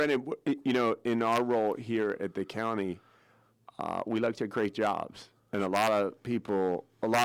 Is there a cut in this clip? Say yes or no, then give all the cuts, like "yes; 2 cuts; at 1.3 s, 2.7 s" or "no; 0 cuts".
no; 0 cuts